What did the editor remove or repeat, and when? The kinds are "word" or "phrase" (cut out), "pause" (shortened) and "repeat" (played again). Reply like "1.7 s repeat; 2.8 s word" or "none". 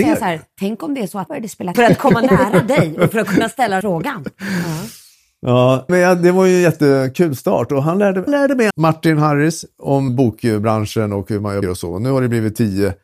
1.3 s word; 1.7 s word; 3.8 s word; 5.9 s word; 8.3 s word; 8.7 s word; 10.1 s word; 11.6 s word